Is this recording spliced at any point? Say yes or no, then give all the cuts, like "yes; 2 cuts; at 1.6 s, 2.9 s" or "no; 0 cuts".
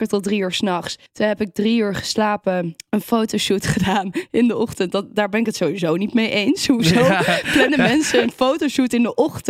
yes; 1 cut; at 1.1 s